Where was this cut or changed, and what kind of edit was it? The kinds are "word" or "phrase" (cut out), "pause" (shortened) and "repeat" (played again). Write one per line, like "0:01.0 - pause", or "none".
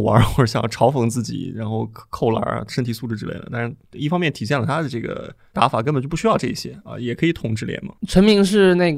0:08.0 - pause